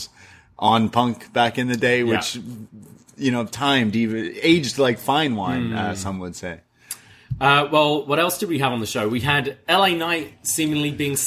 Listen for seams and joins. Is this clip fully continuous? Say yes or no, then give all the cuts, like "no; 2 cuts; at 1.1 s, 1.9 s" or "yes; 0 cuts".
yes; 0 cuts